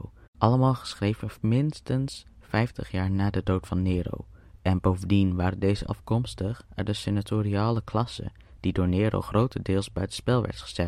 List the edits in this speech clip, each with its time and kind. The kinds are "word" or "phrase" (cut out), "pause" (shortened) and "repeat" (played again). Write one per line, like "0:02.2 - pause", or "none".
0:05.9 - phrase